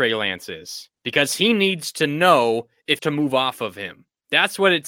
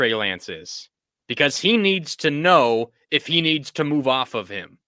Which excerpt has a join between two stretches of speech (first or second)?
first